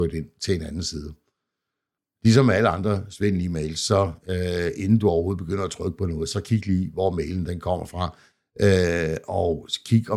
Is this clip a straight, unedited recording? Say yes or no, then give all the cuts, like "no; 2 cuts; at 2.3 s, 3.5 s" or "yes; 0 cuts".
yes; 0 cuts